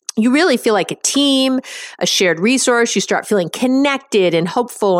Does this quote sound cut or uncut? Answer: uncut